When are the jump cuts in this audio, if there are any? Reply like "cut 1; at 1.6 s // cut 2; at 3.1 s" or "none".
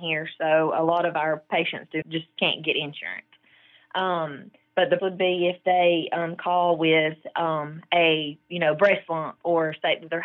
cut 1; at 2.0 s // cut 2; at 5.0 s